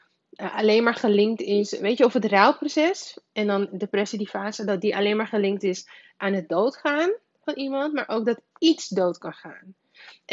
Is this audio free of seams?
yes; 0 cuts

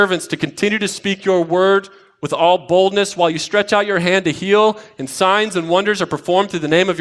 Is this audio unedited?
yes; 0 cuts

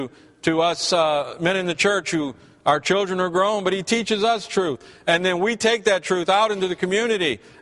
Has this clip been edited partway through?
no; 0 cuts

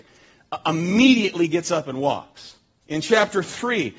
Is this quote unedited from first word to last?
yes; 0 cuts

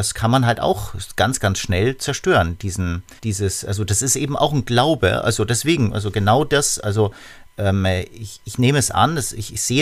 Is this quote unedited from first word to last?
no; 1 cut; at 3.2 s

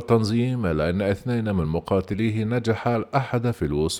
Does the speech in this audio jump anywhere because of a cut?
no; 0 cuts

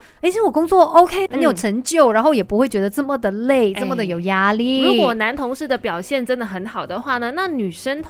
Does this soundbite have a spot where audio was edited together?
yes; 1 cut; at 1.3 s

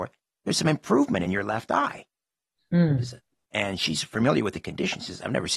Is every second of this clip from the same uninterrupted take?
yes; 0 cuts

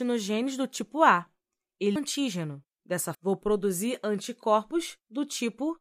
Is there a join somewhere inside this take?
yes; 2 cuts; at 2.0 s, 3.1 s

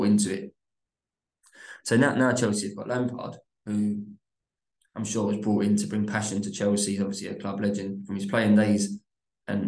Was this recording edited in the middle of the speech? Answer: no; 0 cuts

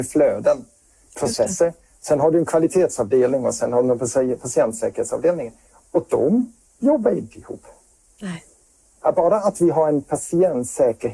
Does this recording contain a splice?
no; 0 cuts

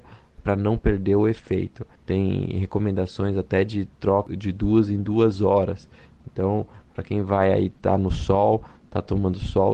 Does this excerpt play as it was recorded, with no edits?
no; 1 cut; at 1.9 s

